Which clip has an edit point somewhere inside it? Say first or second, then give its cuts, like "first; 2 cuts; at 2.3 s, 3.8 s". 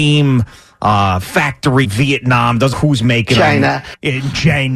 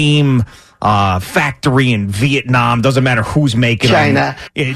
first; 2 cuts; at 1.8 s, 2.7 s